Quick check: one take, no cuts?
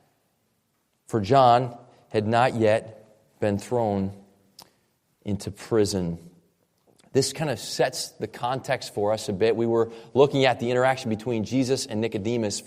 yes; 0 cuts

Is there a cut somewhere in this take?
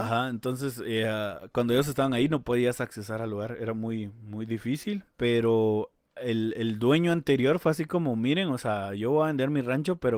yes; 1 cut; at 5.1 s

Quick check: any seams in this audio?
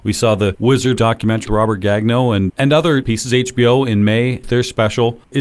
yes; 5 cuts; at 1.0 s, 1.5 s, 2.5 s, 3.0 s, 4.4 s

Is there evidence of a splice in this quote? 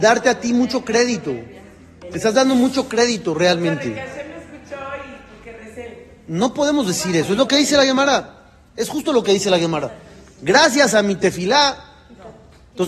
no; 0 cuts

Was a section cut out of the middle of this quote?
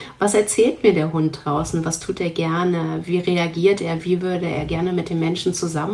no; 0 cuts

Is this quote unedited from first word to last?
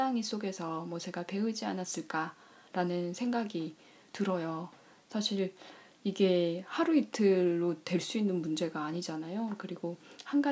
yes; 0 cuts

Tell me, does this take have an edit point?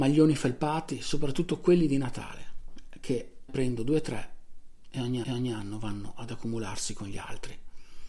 yes; 2 cuts; at 3.5 s, 5.2 s

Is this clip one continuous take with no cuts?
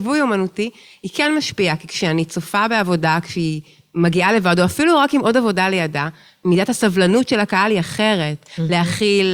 yes; 0 cuts

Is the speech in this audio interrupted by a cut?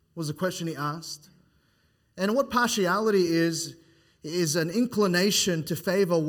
no; 0 cuts

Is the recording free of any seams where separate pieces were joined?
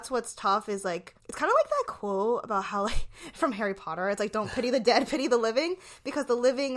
no; 1 cut; at 1.2 s

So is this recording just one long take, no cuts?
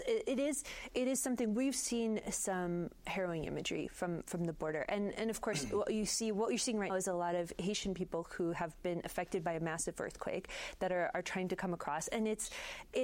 no; 1 cut; at 6.9 s

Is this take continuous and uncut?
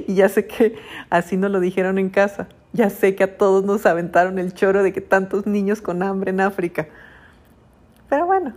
yes; 0 cuts

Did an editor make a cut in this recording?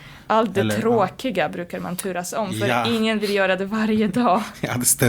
no; 0 cuts

